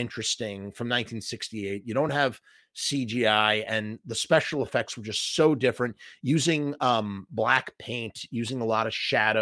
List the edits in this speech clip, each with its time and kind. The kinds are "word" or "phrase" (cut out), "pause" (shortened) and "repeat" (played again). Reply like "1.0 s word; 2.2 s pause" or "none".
none